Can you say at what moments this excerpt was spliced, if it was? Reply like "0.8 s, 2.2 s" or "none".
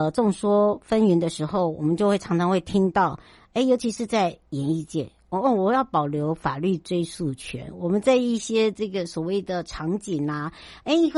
none